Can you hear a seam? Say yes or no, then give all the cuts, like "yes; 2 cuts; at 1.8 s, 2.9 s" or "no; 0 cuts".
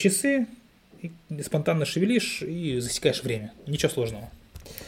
no; 0 cuts